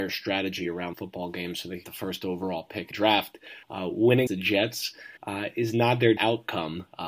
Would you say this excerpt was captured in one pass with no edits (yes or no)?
no